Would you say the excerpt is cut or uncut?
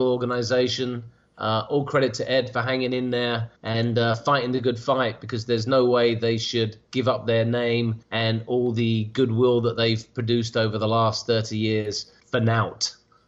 cut